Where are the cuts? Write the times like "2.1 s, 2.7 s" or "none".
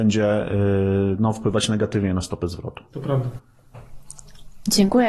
none